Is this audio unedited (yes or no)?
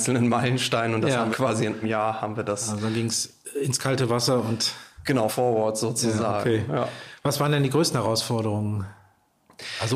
no